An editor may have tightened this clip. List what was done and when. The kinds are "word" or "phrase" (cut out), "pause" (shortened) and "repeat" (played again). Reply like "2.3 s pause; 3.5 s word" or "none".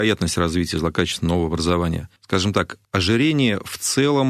2.2 s pause; 2.8 s pause

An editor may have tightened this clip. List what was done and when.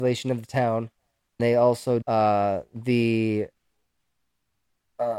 1.4 s word; 2.0 s word

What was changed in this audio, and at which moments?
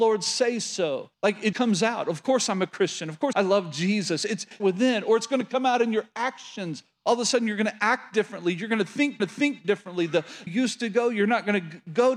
1.1 s pause; 1.5 s word; 3.3 s word; 4.6 s phrase; 9.2 s repeat; 10.5 s phrase

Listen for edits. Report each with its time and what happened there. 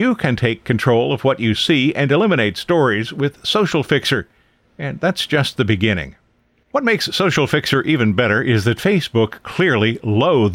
none

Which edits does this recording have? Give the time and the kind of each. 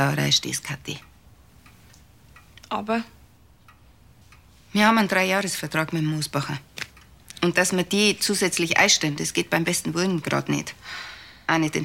none

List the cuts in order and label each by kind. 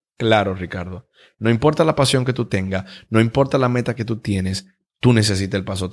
none

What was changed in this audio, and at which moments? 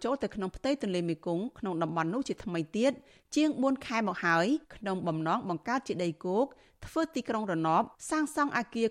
4.6 s pause

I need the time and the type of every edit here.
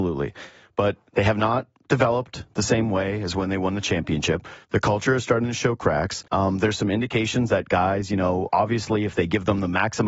4.6 s pause; 6.3 s pause

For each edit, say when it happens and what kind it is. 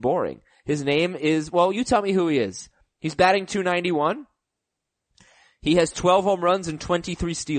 none

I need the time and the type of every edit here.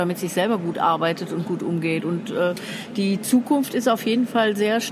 none

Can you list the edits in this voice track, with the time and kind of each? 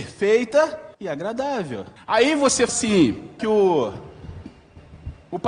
0.9 s pause; 2.0 s pause; 2.7 s word; 3.4 s phrase

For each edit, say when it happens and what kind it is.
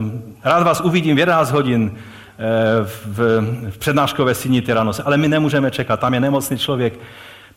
none

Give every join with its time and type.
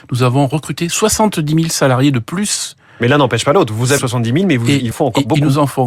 4.0 s word; 4.9 s phrase

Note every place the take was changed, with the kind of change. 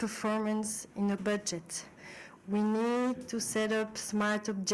1.2 s word

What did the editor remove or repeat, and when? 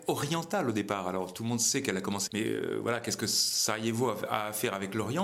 2.3 s phrase

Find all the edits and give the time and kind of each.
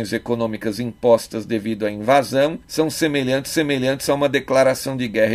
2.6 s pause; 3.5 s repeat

